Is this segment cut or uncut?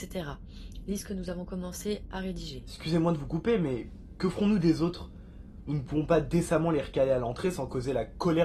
uncut